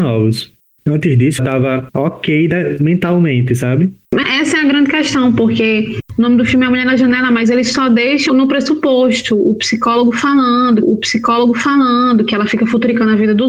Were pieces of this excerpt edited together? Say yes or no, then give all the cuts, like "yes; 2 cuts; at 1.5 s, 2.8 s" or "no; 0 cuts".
yes; 4 cuts; at 1.4 s, 4.2 s, 8.3 s, 10.8 s